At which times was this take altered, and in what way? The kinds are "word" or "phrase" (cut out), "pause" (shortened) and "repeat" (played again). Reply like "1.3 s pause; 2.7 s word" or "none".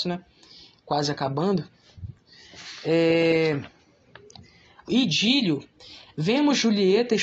4.9 s phrase